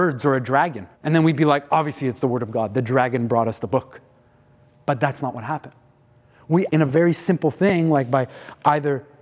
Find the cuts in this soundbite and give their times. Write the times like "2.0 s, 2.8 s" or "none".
0.9 s, 6.7 s